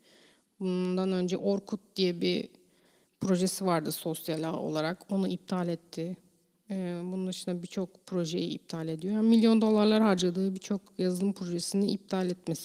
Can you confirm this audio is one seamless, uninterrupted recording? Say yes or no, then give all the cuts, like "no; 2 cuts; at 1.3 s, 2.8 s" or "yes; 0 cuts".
yes; 0 cuts